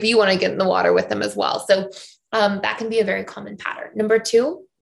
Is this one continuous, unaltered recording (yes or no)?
yes